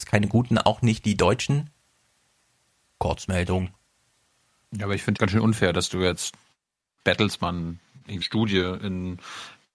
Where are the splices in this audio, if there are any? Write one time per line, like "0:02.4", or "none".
0:05.2
0:08.2